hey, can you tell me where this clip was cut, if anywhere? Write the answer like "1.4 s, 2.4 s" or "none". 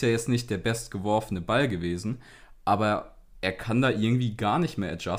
none